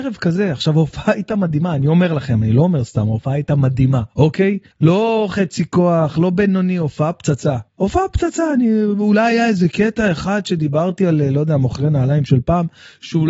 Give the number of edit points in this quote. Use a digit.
3